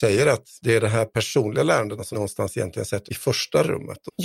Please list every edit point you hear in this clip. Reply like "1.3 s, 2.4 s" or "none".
2.1 s, 3.1 s